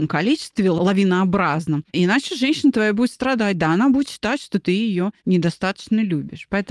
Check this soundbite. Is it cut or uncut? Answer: cut